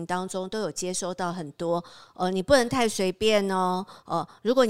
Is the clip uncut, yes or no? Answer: yes